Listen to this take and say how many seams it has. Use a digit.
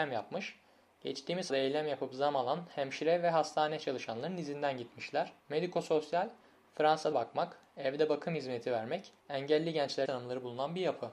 5